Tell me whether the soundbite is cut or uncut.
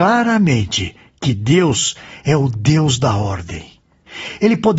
uncut